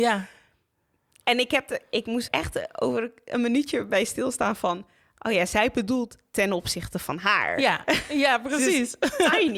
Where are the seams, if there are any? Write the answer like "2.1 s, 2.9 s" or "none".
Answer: 2.3 s